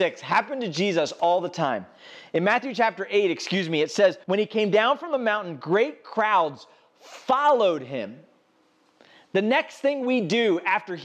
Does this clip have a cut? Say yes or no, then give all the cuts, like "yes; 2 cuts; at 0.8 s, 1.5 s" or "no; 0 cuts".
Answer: yes; 1 cut; at 4.2 s